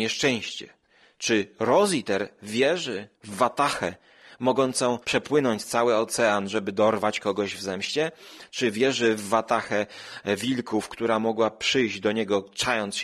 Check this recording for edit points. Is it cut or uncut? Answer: cut